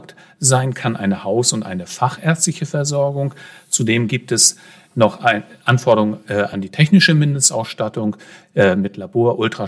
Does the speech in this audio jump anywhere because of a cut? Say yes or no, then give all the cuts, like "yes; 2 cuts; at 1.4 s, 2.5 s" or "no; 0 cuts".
no; 0 cuts